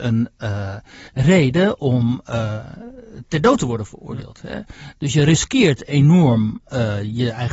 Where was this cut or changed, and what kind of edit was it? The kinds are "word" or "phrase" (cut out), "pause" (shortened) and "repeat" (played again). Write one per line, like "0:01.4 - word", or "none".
0:01.1 - pause